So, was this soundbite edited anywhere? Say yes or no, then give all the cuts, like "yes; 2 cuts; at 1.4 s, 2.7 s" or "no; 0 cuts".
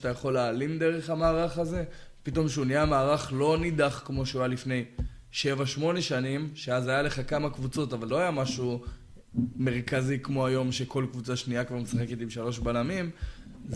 yes; 1 cut; at 8.1 s